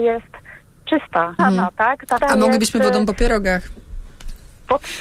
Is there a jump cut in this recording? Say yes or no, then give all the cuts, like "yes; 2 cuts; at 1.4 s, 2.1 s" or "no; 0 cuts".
yes; 2 cuts; at 1.4 s, 2.2 s